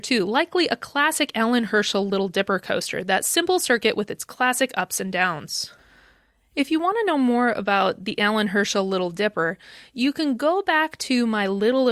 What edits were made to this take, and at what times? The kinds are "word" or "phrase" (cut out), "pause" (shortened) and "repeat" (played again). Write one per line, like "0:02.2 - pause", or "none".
none